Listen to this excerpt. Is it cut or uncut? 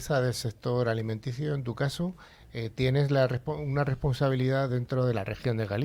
uncut